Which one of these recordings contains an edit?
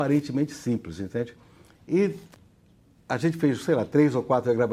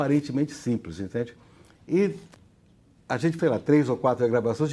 second; 1 cut; at 3.4 s

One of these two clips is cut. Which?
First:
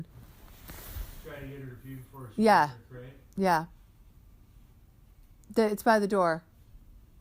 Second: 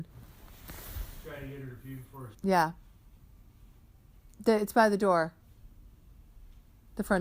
second; 2 cuts; at 2.3 s, 4.3 s

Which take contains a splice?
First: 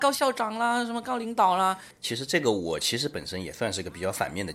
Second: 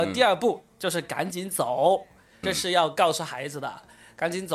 second; 1 cut; at 2.4 s

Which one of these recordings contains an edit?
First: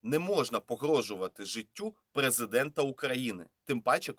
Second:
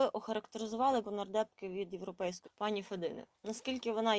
second; 2 cuts; at 1.0 s, 2.4 s

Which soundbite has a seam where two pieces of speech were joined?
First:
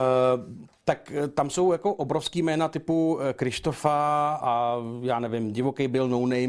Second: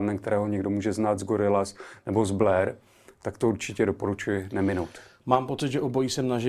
first; 1 cut; at 4.4 s

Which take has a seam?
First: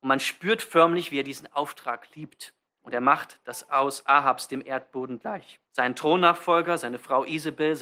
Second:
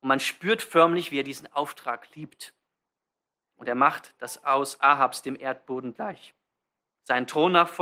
first; 2 cuts; at 2.7 s, 5.7 s

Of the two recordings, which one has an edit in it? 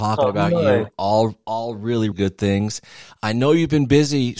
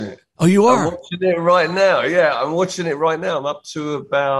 first; 1 cut; at 2.1 s

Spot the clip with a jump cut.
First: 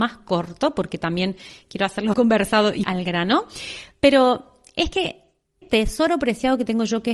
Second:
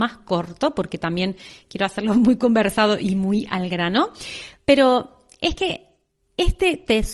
first; 3 cuts; at 2.1 s, 2.8 s, 5.6 s

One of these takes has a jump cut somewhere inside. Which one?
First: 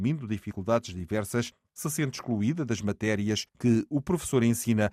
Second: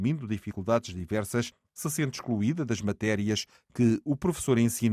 first; 1 cut; at 3.5 s

